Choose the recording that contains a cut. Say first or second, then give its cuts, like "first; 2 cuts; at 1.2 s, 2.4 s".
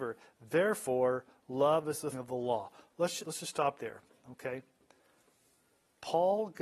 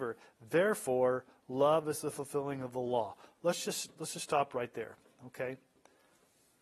first; 3 cuts; at 2.1 s, 3.2 s, 3.8 s